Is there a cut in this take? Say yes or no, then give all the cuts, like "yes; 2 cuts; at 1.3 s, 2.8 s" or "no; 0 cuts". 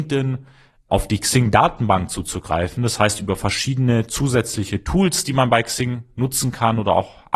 no; 0 cuts